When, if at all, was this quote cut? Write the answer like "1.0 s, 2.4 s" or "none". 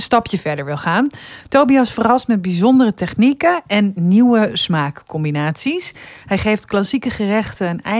none